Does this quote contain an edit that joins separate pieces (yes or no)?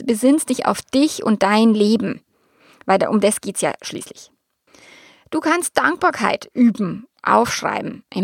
yes